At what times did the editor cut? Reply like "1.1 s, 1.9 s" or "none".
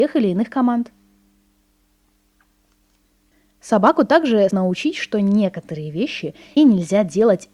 4.5 s, 6.6 s